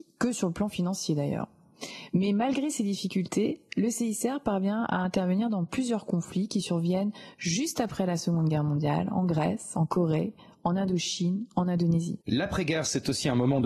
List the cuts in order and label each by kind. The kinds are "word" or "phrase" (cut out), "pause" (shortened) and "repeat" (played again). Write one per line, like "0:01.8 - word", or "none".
0:12.2 - pause